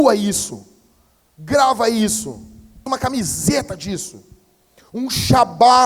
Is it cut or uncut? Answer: cut